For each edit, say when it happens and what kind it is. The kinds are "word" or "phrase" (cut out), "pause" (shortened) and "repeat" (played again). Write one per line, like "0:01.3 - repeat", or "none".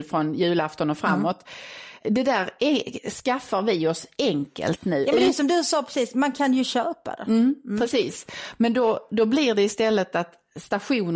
none